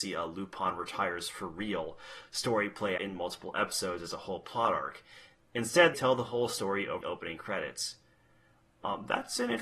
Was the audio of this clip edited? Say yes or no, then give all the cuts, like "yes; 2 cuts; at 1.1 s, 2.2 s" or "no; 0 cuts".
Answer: yes; 3 cuts; at 3.0 s, 5.9 s, 7.0 s